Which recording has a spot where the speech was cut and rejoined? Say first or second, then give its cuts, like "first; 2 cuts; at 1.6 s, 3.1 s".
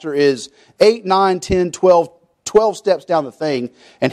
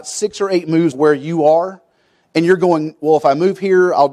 second; 1 cut; at 0.9 s